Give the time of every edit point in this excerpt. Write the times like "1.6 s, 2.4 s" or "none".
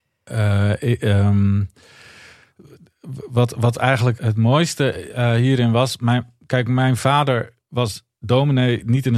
4.2 s